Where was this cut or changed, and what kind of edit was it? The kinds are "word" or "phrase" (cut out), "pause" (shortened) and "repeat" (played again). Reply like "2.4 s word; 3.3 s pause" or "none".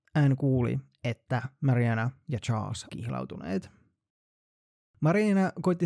2.9 s word